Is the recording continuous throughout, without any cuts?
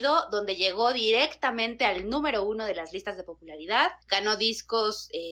no; 1 cut; at 4.0 s

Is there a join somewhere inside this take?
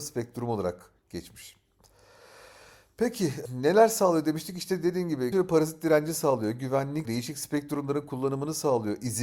yes; 3 cuts; at 3.4 s, 5.3 s, 7.0 s

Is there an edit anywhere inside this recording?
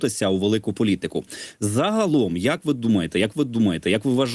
yes; 1 cut; at 3.3 s

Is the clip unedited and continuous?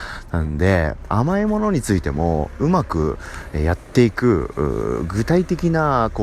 no; 1 cut; at 1.1 s

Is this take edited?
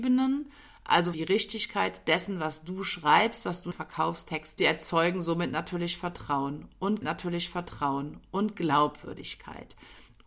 yes; 4 cuts; at 1.1 s, 3.7 s, 4.6 s, 7.0 s

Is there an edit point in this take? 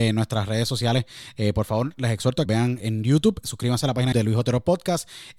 yes; 3 cuts; at 2.5 s, 2.8 s, 4.1 s

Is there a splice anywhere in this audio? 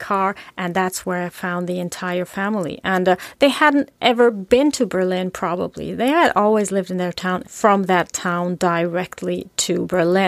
yes; 1 cut; at 7.4 s

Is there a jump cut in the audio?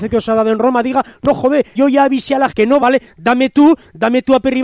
yes; 3 cuts; at 1.8 s, 2.5 s, 2.8 s

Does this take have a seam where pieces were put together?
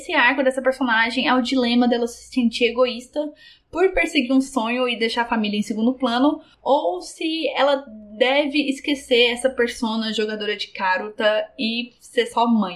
no; 0 cuts

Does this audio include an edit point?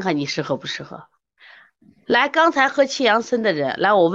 no; 0 cuts

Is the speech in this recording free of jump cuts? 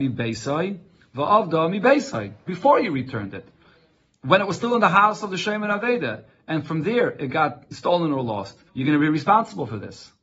no; 1 cut; at 8.7 s

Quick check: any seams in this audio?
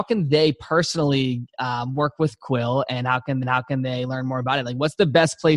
yes; 1 cut; at 3.4 s

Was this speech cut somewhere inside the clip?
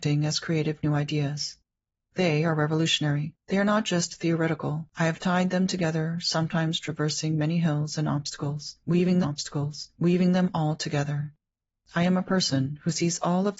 yes; 3 cuts; at 3.4 s, 4.9 s, 9.2 s

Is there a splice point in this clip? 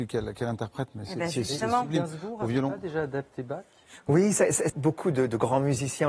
yes; 1 cut; at 4.7 s

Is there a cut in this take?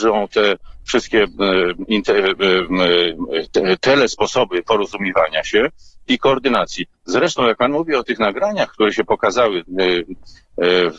no; 0 cuts

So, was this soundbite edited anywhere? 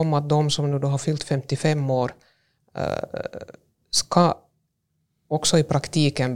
no; 0 cuts

